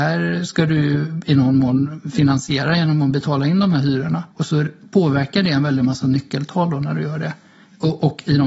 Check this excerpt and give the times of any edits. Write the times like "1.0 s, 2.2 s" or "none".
4.3 s